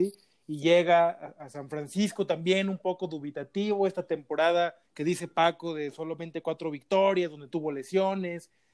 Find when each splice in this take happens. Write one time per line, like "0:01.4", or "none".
0:04.9
0:07.5

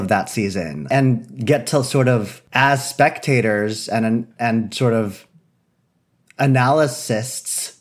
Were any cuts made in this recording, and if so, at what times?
none

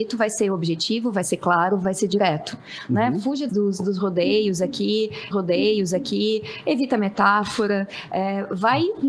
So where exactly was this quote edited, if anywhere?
0:03.5
0:05.3

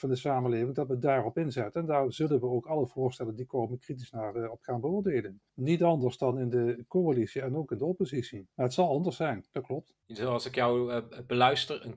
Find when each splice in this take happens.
0:05.5
0:08.5
0:10.0

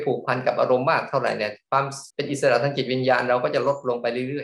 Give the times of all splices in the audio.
0:02.1

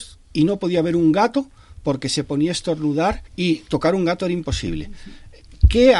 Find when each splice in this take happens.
0:03.3

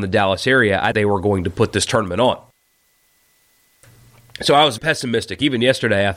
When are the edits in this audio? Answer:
0:00.9
0:04.8

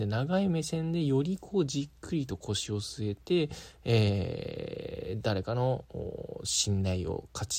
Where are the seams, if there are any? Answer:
none

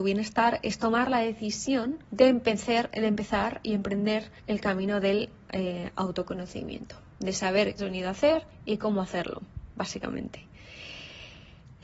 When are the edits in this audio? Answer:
0:02.0
0:04.4
0:07.8

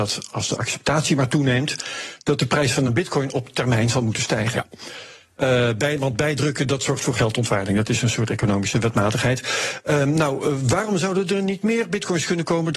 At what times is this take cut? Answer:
none

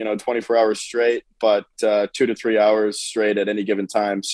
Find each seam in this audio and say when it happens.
none

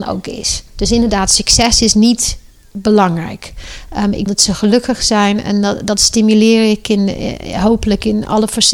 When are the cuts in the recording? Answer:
0:04.3

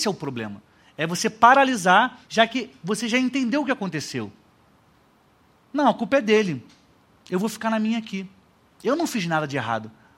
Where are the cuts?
0:02.2

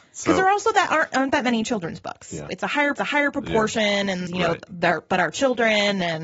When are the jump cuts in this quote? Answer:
0:02.5
0:02.9
0:04.3

